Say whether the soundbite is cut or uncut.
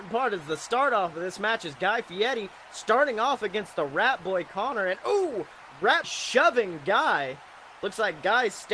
cut